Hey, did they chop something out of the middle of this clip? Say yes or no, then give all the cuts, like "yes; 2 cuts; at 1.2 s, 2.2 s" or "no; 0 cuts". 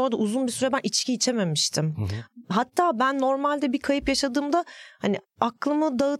no; 0 cuts